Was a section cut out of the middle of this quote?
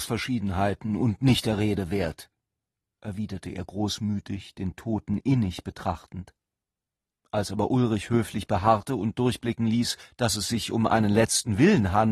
no; 0 cuts

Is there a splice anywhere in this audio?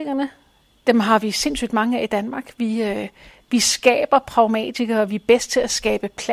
no; 0 cuts

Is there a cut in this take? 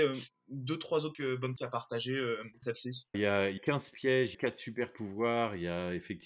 yes; 6 cuts; at 1.1 s, 1.6 s, 2.6 s, 3.1 s, 3.6 s, 4.3 s

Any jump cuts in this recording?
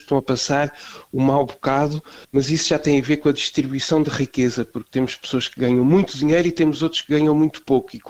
yes; 1 cut; at 2.2 s

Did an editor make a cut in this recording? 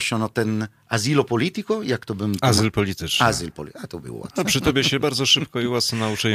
no; 0 cuts

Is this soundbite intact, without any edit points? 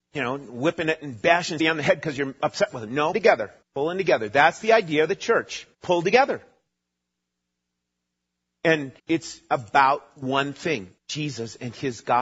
no; 6 cuts; at 1.6 s, 3.1 s, 3.6 s, 5.7 s, 9.0 s, 11.0 s

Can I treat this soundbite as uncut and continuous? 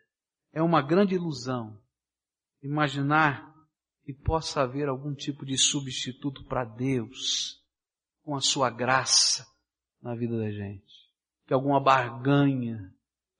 yes; 0 cuts

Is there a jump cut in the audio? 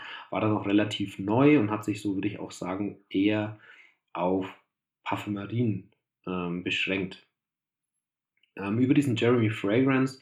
no; 0 cuts

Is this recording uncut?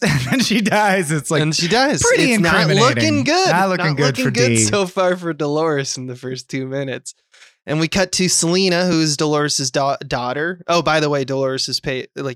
yes; 0 cuts

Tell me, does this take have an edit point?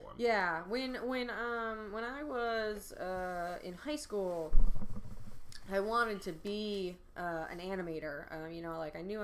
no; 0 cuts

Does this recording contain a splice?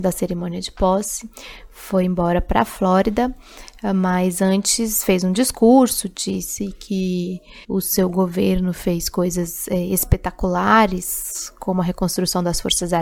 yes; 1 cut; at 7.6 s

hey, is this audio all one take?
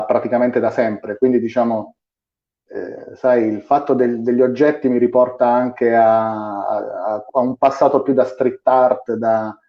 yes; 0 cuts

